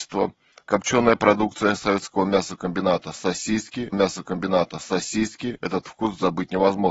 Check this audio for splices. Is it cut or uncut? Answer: cut